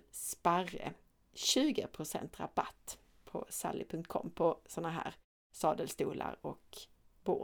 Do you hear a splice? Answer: no; 0 cuts

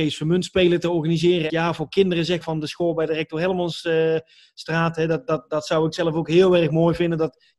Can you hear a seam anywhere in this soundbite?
yes; 2 cuts; at 1.5 s, 2.4 s

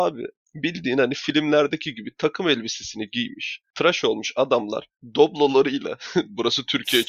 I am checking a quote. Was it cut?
no; 0 cuts

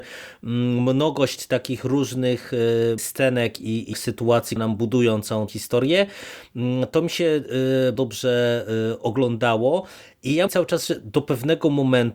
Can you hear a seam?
yes; 6 cuts; at 3.0 s, 3.9 s, 4.6 s, 5.5 s, 7.9 s, 10.5 s

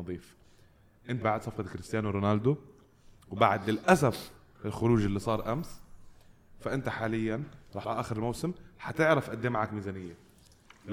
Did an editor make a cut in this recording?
yes; 2 cuts; at 1.2 s, 7.8 s

